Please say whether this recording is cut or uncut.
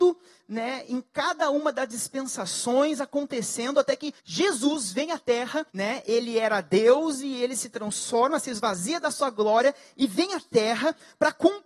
cut